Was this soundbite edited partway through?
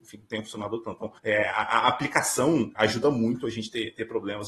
yes; 2 cuts; at 1.2 s, 2.8 s

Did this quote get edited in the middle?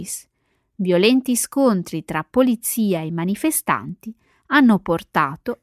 no; 0 cuts

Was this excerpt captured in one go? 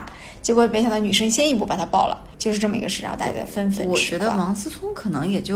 no; 1 cut; at 2.3 s

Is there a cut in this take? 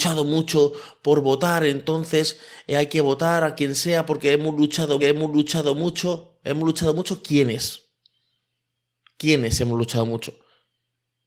yes; 1 cut; at 5.0 s

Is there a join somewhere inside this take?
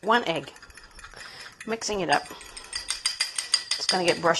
no; 0 cuts

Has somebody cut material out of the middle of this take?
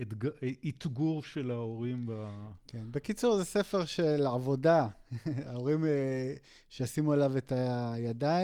no; 0 cuts

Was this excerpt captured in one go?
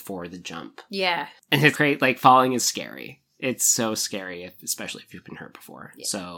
no; 2 cuts; at 1.7 s, 2.6 s

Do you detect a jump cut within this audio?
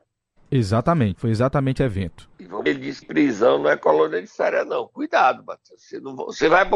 yes; 5 cuts; at 1.1 s, 1.8 s, 2.3 s, 2.7 s, 3.0 s

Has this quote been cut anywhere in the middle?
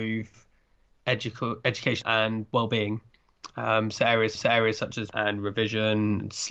yes; 3 cuts; at 2.0 s, 4.3 s, 5.1 s

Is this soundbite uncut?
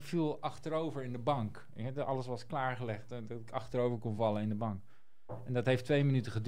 yes; 0 cuts

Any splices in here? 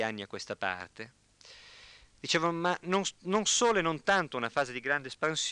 no; 0 cuts

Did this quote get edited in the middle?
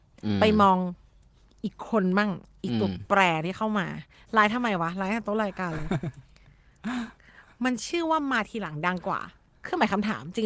no; 0 cuts

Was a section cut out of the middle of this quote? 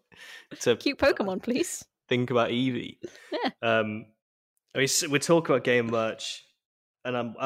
no; 0 cuts

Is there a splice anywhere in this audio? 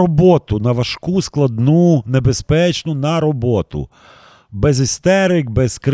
no; 0 cuts

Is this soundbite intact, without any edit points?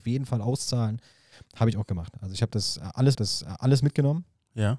no; 1 cut; at 3.1 s

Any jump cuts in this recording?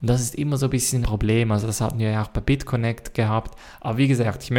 yes; 1 cut; at 1.0 s

